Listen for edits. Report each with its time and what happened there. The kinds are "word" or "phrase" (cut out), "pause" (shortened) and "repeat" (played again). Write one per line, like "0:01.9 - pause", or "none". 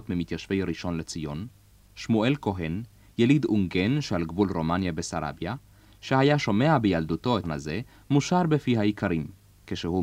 0:07.4 - word

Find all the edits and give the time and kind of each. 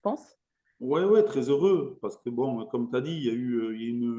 none

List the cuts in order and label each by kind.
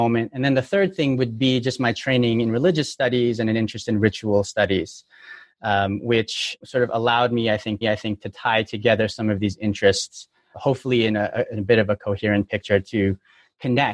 0:06.6 - word
0:07.8 - repeat
0:10.5 - word

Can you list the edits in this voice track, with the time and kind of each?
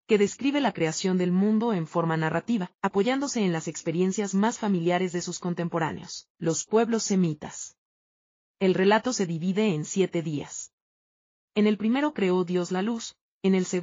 none

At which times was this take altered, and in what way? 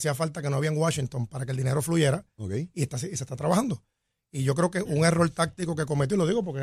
none

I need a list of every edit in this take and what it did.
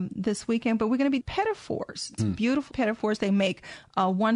0:01.2 - word
0:02.2 - word
0:02.7 - word

